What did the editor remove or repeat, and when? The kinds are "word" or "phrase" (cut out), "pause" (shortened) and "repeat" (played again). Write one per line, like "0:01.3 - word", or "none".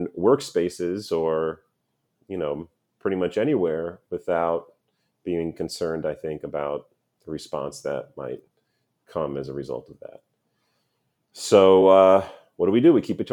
none